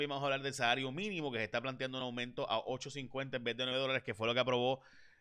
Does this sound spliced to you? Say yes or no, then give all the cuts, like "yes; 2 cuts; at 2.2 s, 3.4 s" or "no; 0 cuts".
no; 0 cuts